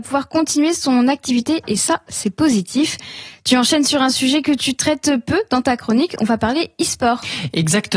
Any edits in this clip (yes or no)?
no